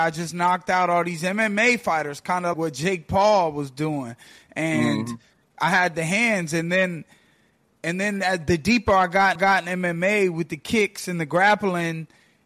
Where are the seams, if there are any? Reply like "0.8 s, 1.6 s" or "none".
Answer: 2.5 s, 9.4 s

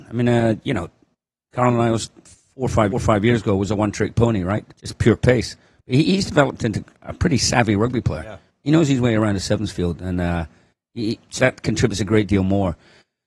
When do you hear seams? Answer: 2.9 s, 4.7 s, 6.9 s, 11.4 s

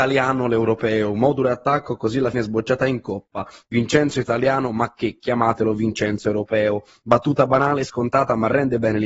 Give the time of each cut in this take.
2.3 s

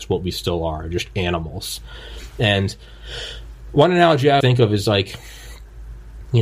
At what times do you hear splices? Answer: 4.4 s

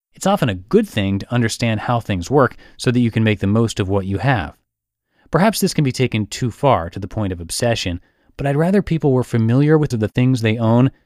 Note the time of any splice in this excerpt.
9.9 s

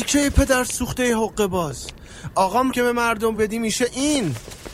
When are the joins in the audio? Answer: 2.7 s, 3.4 s

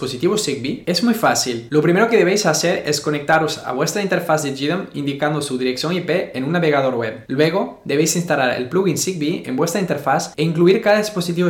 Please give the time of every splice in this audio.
none

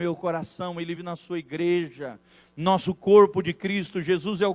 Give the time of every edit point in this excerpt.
1.0 s, 2.8 s

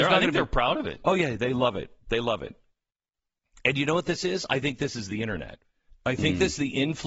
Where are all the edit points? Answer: 5.9 s

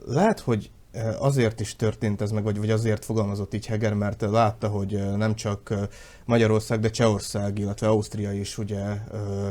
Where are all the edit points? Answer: none

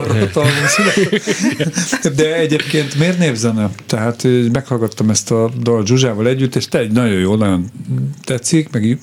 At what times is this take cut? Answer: none

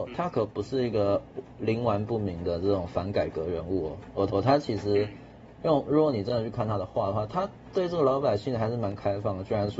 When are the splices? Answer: 4.3 s

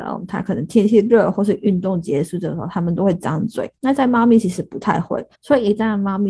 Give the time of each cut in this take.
3.8 s, 5.3 s

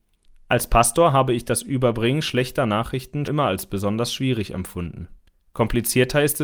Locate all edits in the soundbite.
3.3 s, 5.3 s

